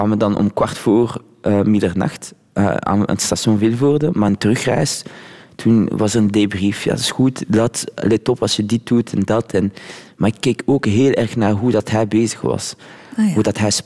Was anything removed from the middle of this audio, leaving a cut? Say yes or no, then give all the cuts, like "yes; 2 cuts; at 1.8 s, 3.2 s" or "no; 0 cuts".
no; 0 cuts